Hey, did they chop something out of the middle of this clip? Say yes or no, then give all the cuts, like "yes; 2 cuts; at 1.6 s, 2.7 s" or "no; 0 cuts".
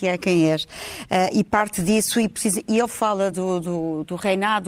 no; 0 cuts